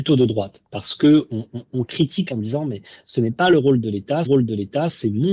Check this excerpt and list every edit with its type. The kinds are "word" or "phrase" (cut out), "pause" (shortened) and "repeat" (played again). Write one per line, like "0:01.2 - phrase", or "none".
0:02.3 - word
0:04.3 - repeat